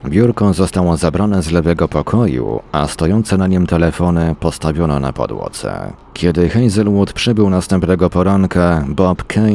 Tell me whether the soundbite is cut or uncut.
uncut